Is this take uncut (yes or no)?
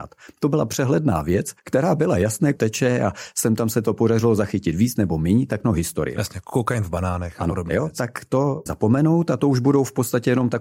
no